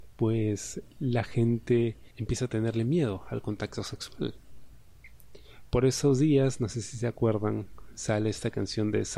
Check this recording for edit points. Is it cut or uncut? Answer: cut